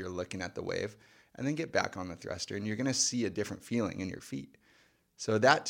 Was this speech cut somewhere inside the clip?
no; 0 cuts

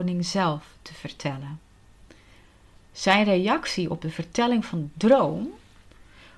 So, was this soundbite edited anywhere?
no; 0 cuts

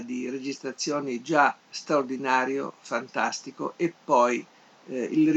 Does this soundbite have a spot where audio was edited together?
yes; 1 cut; at 1.6 s

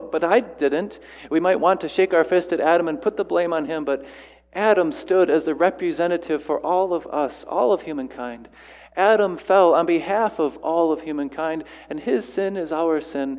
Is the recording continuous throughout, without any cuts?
yes; 0 cuts

